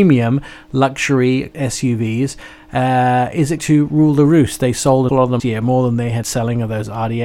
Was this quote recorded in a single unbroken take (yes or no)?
no